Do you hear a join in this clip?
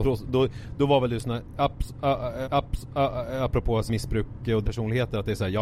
yes; 3 cuts; at 2.4 s, 3.9 s, 4.6 s

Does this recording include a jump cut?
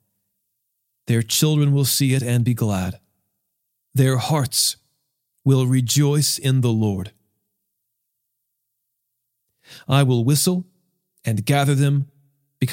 no; 0 cuts

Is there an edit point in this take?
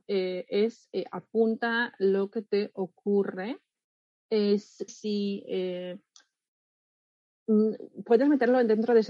yes; 1 cut; at 4.9 s

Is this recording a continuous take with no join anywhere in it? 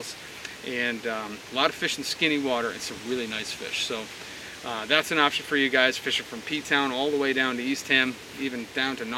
yes; 0 cuts

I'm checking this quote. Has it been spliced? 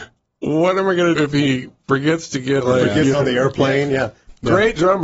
yes; 3 cuts; at 1.2 s, 2.6 s, 3.1 s

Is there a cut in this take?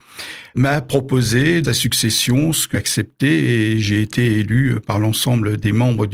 yes; 2 cuts; at 1.6 s, 2.7 s

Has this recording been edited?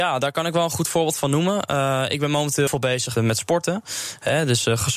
yes; 2 cuts; at 2.7 s, 3.1 s

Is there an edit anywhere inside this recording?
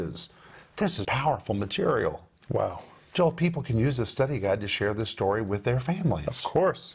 yes; 1 cut; at 1.0 s

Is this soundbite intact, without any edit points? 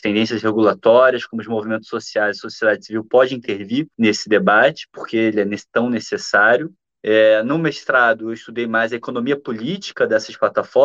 yes; 0 cuts

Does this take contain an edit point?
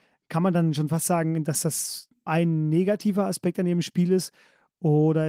yes; 1 cut; at 2.3 s

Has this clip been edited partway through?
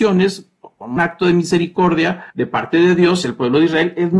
yes; 2 cuts; at 1.0 s, 2.3 s

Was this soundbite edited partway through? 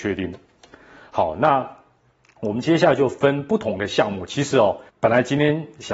yes; 1 cut; at 4.9 s

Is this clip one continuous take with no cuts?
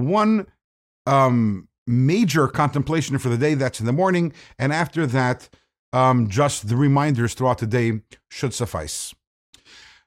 yes; 0 cuts

